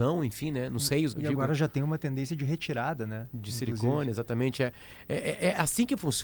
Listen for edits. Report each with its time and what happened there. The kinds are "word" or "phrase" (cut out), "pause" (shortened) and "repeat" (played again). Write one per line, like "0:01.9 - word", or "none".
0:01.1 - word